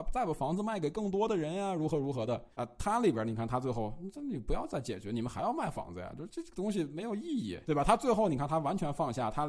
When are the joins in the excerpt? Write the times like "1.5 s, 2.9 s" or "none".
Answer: 2.5 s